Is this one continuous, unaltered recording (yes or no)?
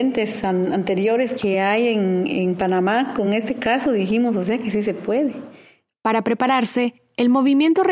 yes